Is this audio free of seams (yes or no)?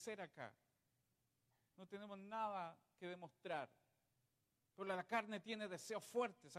yes